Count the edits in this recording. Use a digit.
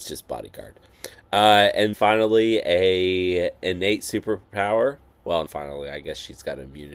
2